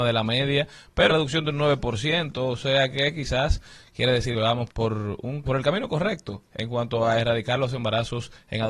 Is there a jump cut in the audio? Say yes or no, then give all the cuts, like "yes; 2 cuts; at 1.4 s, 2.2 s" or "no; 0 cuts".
yes; 4 cuts; at 1.1 s, 4.3 s, 4.7 s, 5.4 s